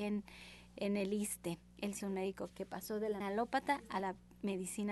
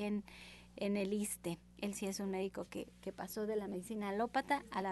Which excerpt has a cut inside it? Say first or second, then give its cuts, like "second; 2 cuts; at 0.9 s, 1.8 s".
first; 3 cuts; at 2.0 s, 2.5 s, 3.2 s